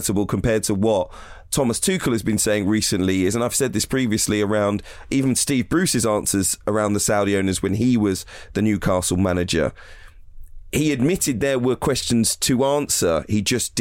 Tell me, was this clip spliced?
no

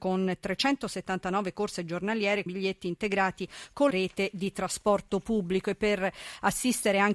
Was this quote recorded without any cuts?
no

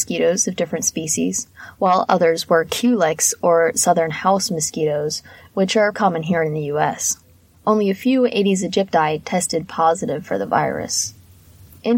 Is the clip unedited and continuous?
no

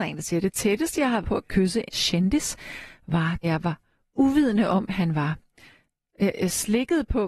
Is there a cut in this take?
yes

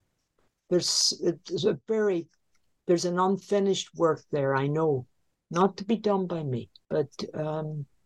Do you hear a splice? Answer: no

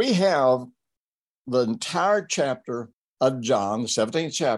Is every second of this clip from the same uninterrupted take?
yes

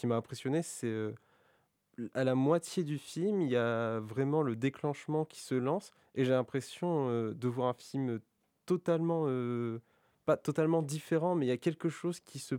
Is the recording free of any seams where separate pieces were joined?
yes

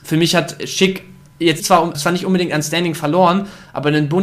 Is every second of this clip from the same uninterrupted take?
no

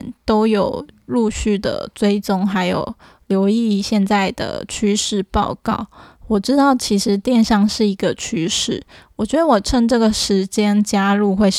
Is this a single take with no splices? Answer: yes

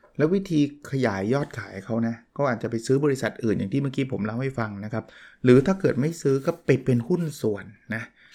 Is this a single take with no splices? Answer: yes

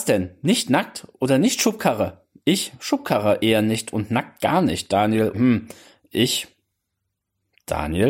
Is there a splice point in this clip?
yes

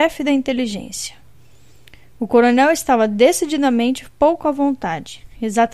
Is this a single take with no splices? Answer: yes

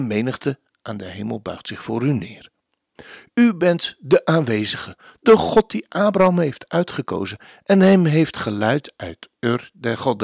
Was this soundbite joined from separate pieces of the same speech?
no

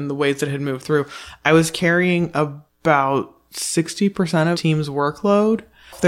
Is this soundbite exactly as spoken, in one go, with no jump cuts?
no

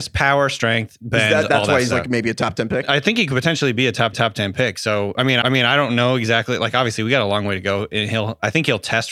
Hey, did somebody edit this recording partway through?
yes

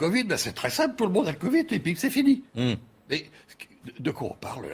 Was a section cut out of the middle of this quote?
no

